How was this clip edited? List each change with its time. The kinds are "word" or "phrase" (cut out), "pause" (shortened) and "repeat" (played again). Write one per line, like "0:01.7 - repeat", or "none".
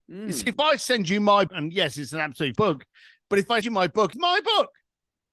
0:01.5 - word
0:02.6 - word
0:03.6 - word
0:04.1 - word